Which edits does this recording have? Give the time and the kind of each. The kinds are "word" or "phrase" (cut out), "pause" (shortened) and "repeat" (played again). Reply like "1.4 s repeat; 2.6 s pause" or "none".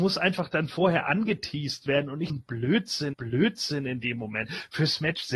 2.3 s word; 3.1 s repeat